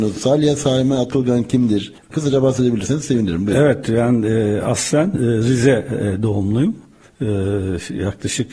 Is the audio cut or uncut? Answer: uncut